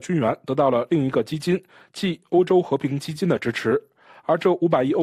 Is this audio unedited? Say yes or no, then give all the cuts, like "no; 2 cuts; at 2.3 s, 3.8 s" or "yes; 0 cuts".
yes; 0 cuts